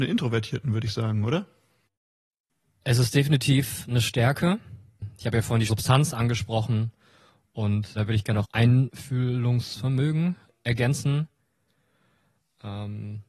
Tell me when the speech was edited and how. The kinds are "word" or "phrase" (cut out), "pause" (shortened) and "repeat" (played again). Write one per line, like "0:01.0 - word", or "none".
0:05.7 - word
0:07.9 - word
0:08.4 - word

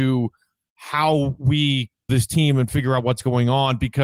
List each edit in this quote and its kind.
0:02.1 - word

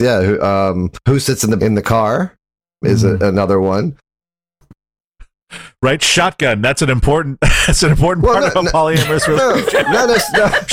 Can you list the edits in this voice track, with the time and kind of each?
0:01.0 - pause
0:01.6 - word
0:02.8 - word
0:09.4 - word

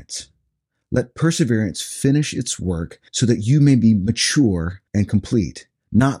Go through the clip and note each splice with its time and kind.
0:03.1 - pause
0:04.9 - pause

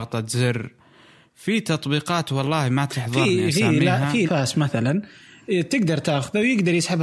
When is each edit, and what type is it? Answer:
0:04.3 - word

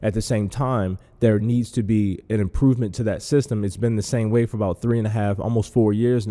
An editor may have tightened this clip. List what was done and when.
none

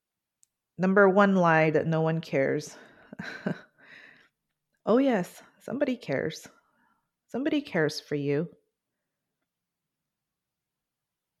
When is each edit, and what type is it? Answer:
none

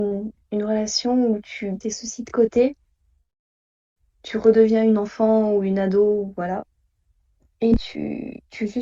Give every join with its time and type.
0:01.8 - word

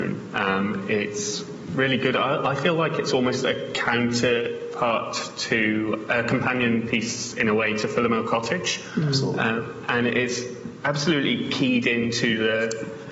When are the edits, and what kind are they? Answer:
none

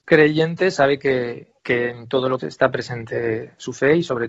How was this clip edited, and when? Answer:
0:01.6 - pause
0:02.4 - phrase

